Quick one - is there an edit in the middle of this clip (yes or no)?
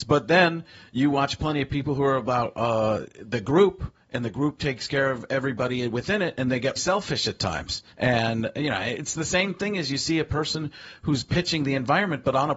yes